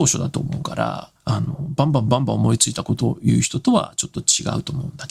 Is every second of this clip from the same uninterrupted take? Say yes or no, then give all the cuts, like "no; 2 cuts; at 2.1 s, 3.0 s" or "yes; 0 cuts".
no; 1 cut; at 1.2 s